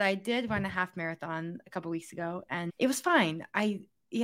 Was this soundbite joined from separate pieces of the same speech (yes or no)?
no